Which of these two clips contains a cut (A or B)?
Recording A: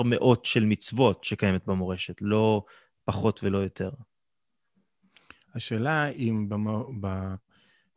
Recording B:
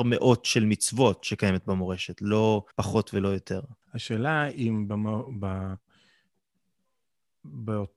B